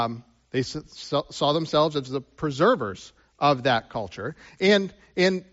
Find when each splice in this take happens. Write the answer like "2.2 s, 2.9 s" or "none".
none